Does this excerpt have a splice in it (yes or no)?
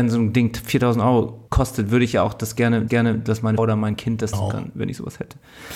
yes